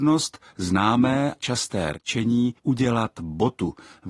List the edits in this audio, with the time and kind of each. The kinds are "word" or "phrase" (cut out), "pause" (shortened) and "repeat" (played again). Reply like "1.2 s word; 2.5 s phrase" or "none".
1.4 s word; 2.6 s pause